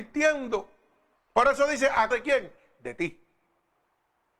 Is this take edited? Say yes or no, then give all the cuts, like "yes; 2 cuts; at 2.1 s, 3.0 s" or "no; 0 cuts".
yes; 2 cuts; at 1.2 s, 2.1 s